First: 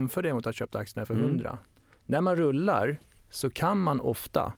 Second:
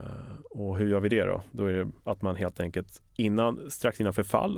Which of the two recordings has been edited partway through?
second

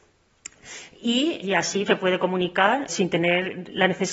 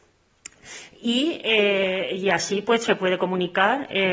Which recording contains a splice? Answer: first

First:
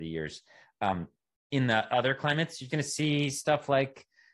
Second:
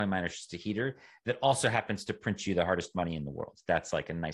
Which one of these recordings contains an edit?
first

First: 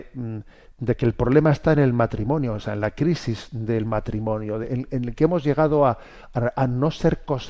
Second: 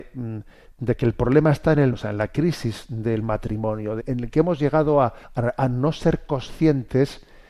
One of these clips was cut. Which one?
second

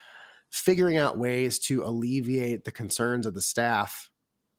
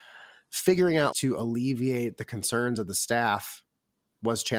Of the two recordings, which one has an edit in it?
second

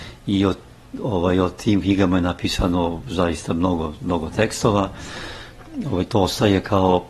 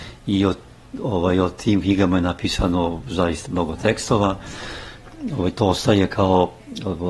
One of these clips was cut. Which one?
second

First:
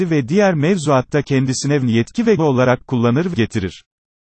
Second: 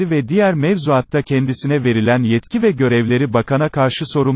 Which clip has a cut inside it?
first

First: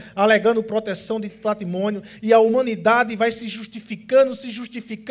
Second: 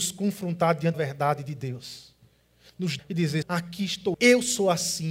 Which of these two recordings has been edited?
second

